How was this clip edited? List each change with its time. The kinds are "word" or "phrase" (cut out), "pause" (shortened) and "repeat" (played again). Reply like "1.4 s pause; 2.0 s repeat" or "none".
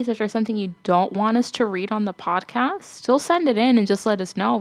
none